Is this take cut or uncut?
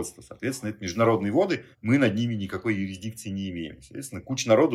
cut